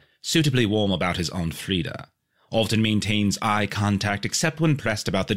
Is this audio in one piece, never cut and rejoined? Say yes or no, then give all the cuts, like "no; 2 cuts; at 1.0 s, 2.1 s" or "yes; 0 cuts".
yes; 0 cuts